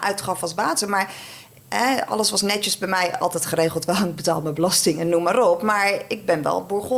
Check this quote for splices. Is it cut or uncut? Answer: uncut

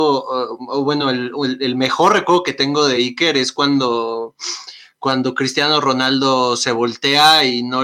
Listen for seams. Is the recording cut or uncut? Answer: uncut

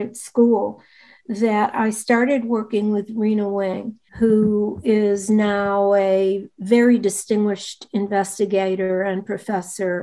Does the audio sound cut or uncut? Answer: cut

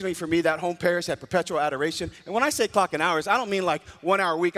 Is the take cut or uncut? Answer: uncut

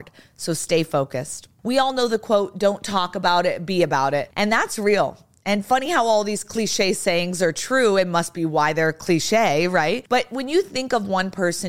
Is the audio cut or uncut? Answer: uncut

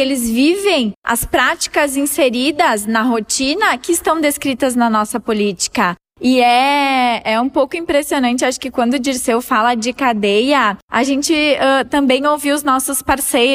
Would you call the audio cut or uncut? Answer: cut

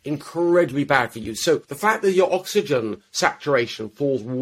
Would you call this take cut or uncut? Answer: cut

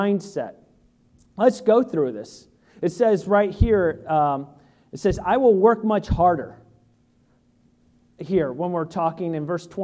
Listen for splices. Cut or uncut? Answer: uncut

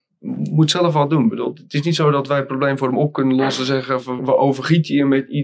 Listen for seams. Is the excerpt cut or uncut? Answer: cut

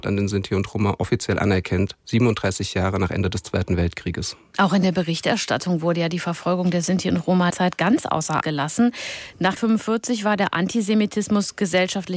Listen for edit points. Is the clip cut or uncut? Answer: cut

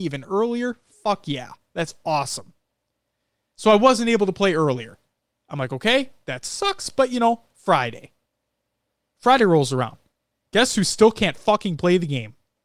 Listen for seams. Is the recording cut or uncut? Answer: uncut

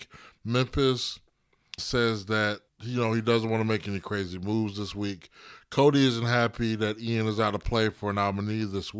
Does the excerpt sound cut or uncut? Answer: cut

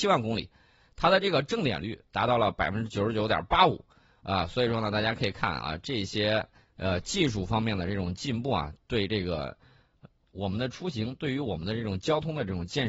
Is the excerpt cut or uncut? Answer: uncut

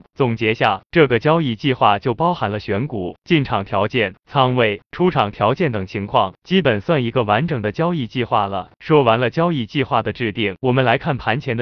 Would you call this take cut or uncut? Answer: uncut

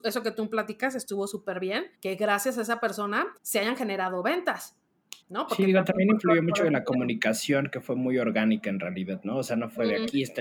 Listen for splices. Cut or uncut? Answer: cut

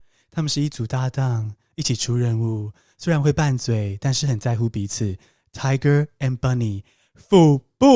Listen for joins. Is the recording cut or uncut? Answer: uncut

